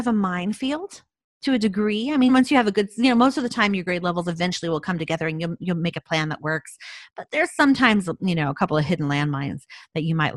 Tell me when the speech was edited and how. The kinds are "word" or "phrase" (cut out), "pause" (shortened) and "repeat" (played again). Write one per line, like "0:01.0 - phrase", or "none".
0:02.3 - word

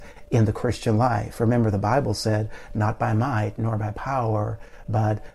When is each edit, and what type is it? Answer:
none

